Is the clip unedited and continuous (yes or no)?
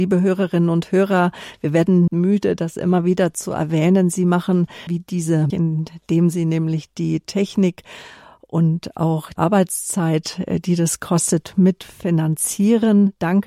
no